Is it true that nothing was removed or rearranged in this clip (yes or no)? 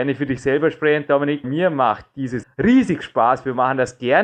no